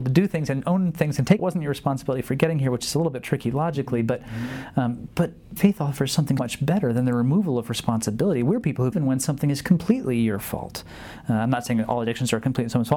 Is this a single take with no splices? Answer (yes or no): no